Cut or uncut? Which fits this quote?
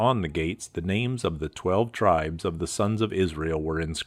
uncut